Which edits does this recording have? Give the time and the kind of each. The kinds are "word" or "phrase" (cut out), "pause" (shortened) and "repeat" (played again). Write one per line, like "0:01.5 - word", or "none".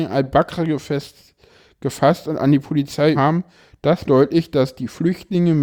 0:03.1 - word
0:04.0 - word